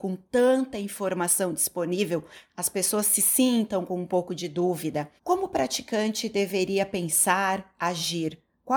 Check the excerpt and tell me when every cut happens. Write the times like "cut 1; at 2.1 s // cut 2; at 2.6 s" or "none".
cut 1; at 5.2 s